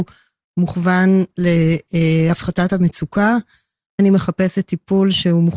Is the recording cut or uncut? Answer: cut